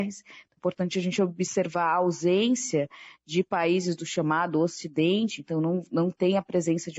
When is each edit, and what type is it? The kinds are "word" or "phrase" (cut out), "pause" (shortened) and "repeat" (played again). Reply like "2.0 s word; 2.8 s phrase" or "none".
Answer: none